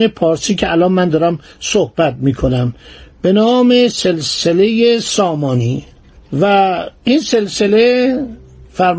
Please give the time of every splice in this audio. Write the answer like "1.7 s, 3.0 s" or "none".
7.0 s